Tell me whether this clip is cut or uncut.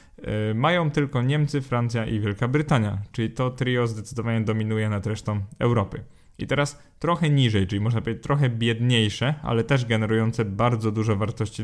uncut